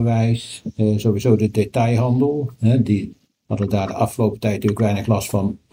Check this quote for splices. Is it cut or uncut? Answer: cut